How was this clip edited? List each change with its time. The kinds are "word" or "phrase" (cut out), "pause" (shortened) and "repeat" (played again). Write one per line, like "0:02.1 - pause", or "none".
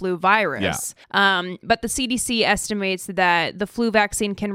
0:01.0 - pause

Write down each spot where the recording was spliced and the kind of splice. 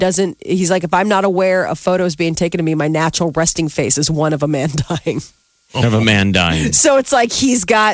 none

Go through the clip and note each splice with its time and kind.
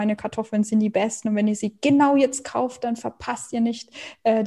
none

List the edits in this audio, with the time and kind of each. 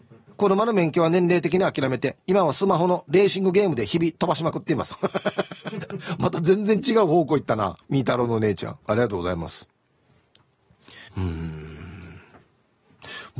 0:02.2 - pause
0:07.8 - pause
0:08.8 - pause
0:11.1 - pause

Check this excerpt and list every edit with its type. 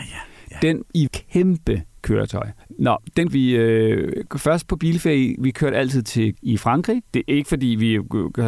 0:01.1 - word
0:03.3 - word
0:06.3 - word

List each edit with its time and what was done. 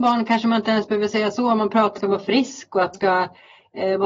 0:02.0 - phrase
0:02.9 - word

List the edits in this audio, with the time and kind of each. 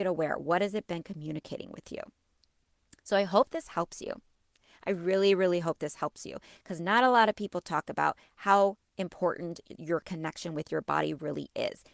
none

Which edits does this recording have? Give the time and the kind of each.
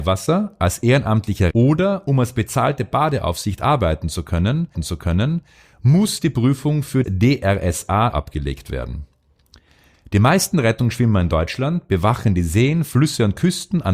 0:01.5 - word
0:04.7 - repeat
0:07.0 - word
0:08.1 - word

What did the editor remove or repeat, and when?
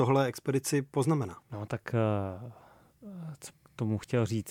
0:01.4 - pause
0:03.5 - word

